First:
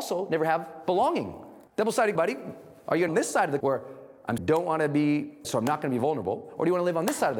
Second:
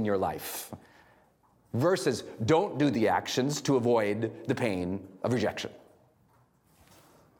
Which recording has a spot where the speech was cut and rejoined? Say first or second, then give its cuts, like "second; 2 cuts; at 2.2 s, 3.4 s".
first; 6 cuts; at 1.7 s, 2.2 s, 3.1 s, 3.6 s, 4.4 s, 5.4 s